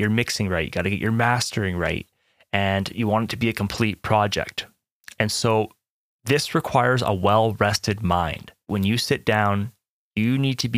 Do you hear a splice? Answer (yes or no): no